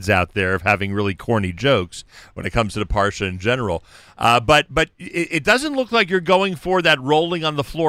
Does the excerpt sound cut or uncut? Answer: uncut